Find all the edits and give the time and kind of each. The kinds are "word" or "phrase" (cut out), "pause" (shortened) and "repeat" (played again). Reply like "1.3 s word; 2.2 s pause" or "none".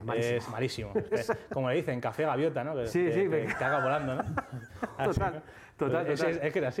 none